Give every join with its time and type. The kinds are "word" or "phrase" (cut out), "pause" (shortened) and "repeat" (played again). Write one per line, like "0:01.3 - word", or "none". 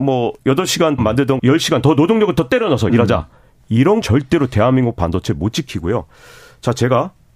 0:01.0 - word
0:01.4 - word
0:02.9 - word
0:04.0 - word